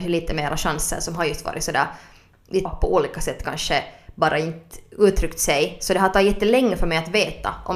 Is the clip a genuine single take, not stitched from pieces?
no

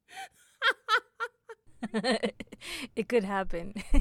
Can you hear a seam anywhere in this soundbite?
no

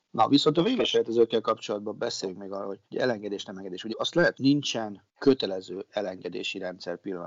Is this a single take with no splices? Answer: no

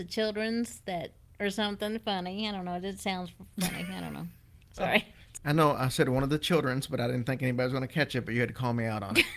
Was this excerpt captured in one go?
yes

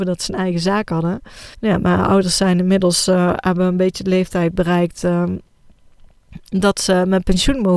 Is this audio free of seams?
no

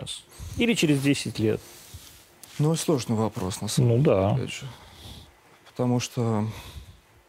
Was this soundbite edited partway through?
no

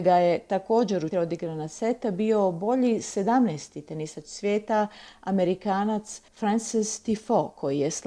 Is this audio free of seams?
no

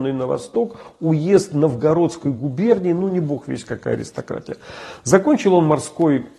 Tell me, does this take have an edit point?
no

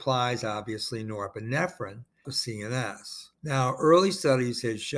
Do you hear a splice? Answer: yes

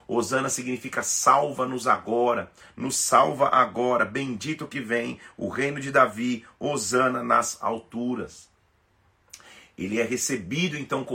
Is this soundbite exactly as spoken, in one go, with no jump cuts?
yes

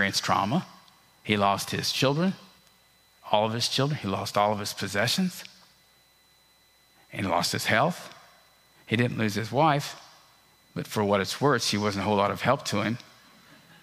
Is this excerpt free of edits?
yes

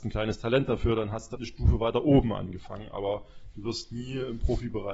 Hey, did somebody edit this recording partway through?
yes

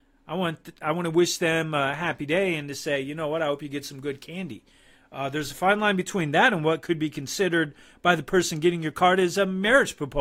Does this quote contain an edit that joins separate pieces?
no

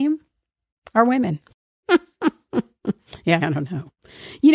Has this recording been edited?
yes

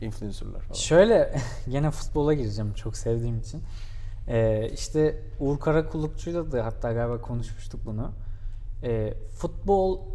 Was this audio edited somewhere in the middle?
no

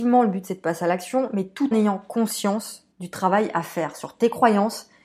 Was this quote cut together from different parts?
yes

